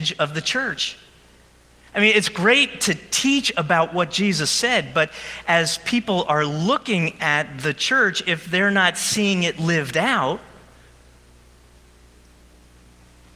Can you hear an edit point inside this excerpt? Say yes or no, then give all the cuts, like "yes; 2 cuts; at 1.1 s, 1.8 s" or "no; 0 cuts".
no; 0 cuts